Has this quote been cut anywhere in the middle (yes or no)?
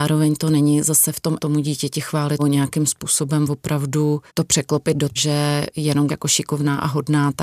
yes